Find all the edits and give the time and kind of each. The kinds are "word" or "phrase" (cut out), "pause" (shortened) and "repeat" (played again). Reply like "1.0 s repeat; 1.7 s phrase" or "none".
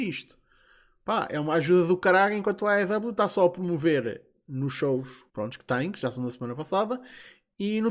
5.3 s pause